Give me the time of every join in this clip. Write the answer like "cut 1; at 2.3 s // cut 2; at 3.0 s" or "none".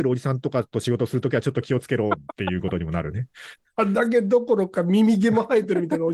none